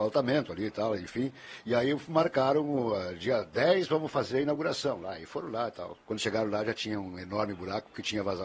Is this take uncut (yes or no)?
no